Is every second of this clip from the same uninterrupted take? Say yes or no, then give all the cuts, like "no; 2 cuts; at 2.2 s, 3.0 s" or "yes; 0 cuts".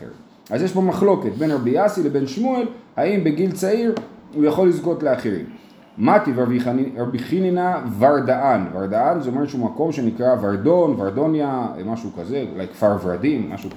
yes; 0 cuts